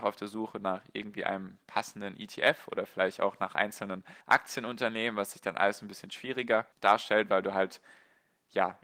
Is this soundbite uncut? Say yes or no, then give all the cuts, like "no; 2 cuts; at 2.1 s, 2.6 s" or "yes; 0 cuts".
no; 2 cuts; at 4.2 s, 6.7 s